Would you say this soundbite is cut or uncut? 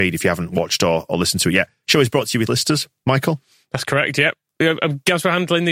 cut